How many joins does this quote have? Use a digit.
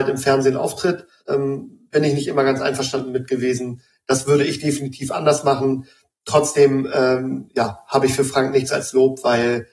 1